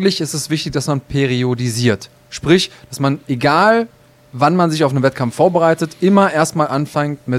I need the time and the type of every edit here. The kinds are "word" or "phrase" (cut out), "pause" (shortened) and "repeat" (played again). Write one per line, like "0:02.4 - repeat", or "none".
none